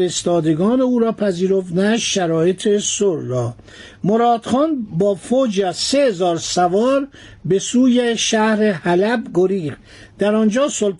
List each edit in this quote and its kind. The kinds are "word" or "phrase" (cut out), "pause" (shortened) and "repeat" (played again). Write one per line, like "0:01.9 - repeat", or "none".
none